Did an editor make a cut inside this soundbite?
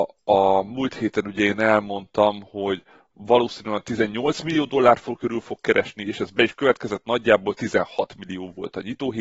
no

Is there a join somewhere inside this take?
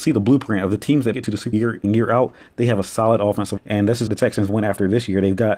yes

